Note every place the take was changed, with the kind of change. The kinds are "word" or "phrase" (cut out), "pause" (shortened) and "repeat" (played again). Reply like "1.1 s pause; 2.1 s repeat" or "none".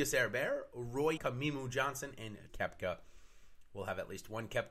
1.2 s word; 2.5 s word